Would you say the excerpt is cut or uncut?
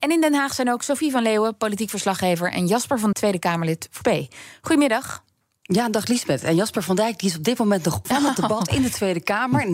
cut